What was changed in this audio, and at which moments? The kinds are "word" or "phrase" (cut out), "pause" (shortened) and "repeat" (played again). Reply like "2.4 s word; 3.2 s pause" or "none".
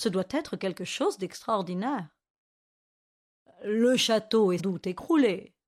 4.6 s word